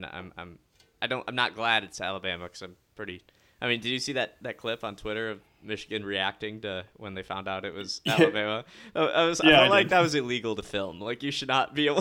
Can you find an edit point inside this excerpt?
no; 0 cuts

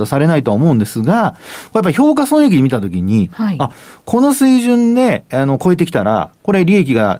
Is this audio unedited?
yes; 0 cuts

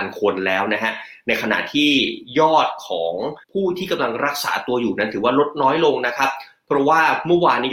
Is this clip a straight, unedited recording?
no; 1 cut; at 3.4 s

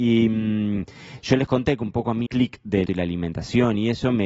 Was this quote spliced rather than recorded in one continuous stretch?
yes; 2 cuts; at 2.3 s, 2.9 s

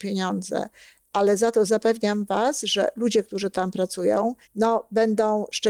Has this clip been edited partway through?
yes; 1 cut; at 4.4 s

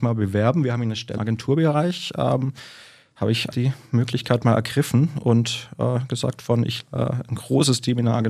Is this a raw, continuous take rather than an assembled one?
no; 3 cuts; at 1.2 s, 3.5 s, 6.8 s

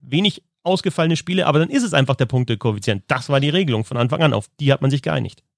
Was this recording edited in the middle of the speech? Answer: no; 0 cuts

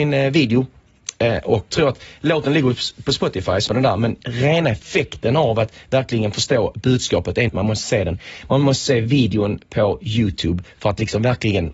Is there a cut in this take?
yes; 3 cuts; at 1.7 s, 3.7 s, 7.5 s

